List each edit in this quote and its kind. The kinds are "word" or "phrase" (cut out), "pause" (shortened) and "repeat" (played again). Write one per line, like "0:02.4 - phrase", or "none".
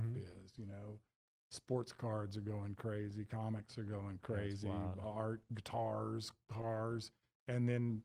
none